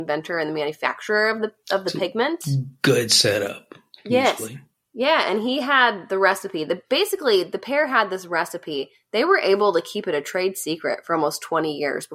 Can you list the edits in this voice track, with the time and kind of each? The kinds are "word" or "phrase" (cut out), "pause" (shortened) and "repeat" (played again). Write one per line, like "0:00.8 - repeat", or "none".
none